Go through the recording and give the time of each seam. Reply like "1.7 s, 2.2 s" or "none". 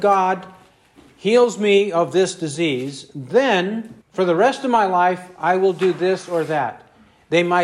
4.0 s